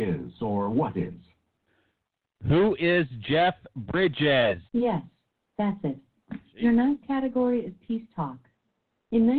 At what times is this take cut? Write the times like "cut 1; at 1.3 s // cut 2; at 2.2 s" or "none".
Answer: cut 1; at 4.7 s